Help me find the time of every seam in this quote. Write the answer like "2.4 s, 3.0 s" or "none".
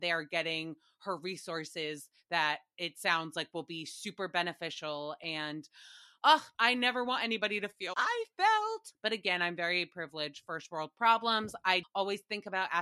6.5 s, 7.9 s, 11.8 s

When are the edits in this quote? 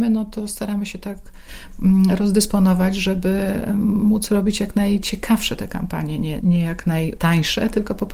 6.4 s

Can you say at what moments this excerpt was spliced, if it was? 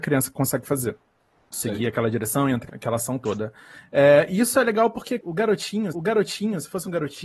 1.3 s, 2.7 s, 5.2 s, 5.9 s

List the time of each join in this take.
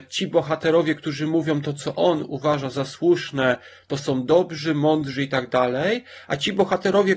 none

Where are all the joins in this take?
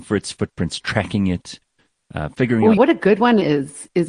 2.8 s

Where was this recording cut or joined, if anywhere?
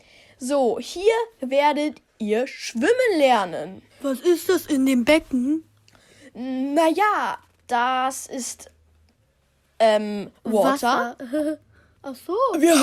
3.9 s, 7.6 s, 10.4 s

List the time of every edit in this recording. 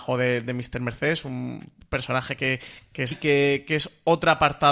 3.1 s

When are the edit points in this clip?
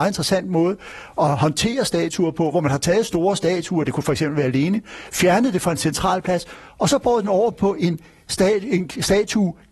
none

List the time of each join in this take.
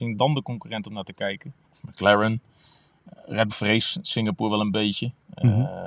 1.6 s, 3.5 s

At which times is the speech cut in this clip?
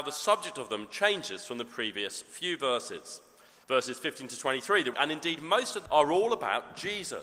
3.6 s, 4.9 s, 5.9 s

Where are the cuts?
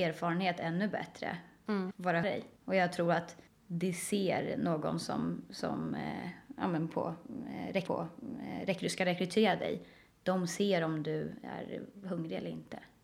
2.2 s, 2.6 s, 3.5 s, 7.9 s

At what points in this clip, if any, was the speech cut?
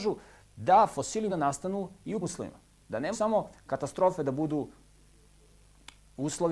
1.3 s, 2.2 s, 3.1 s

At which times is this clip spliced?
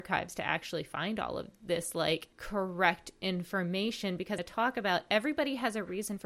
2.3 s, 4.4 s

